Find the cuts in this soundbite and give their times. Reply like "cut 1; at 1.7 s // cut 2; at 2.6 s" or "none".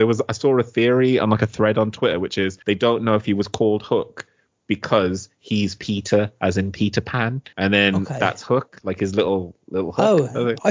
cut 1; at 2.6 s // cut 2; at 7.5 s